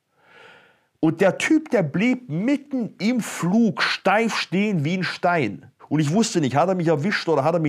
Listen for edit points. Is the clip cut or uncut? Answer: cut